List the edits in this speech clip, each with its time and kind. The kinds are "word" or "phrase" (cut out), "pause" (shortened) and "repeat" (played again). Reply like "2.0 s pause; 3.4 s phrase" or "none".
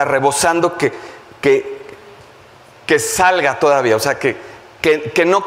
none